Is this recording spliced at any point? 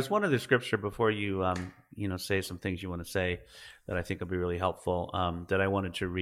no; 0 cuts

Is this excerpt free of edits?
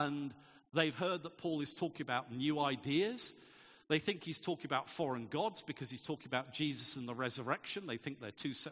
yes; 0 cuts

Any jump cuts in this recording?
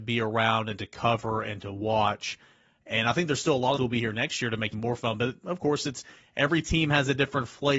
yes; 2 cuts; at 3.8 s, 4.7 s

